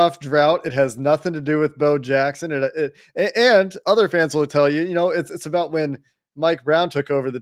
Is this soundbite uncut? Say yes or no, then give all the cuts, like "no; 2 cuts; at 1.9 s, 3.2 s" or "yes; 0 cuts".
yes; 0 cuts